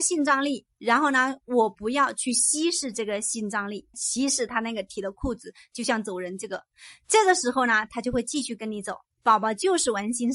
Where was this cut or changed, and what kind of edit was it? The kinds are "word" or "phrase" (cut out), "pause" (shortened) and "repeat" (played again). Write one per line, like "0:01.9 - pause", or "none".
0:03.9 - word